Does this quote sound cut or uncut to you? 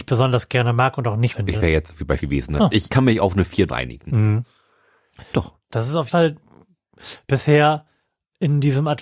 cut